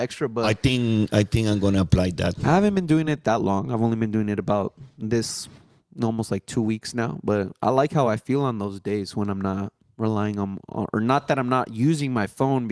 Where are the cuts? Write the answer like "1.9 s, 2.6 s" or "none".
none